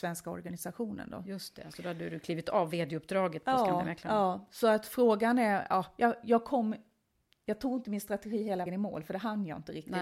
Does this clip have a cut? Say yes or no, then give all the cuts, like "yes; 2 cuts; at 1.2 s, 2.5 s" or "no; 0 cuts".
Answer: yes; 1 cut; at 8.7 s